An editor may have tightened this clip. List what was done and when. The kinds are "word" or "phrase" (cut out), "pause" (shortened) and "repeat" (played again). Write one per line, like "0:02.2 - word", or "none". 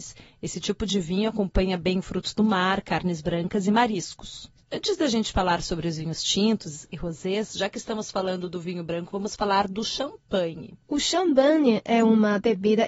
0:10.8 - pause